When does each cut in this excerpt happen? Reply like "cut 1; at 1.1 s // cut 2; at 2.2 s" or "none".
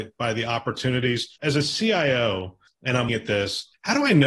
cut 1; at 1.4 s // cut 2; at 2.7 s // cut 3; at 3.1 s